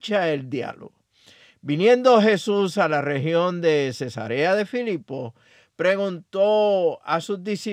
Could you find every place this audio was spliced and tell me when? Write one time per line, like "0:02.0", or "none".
none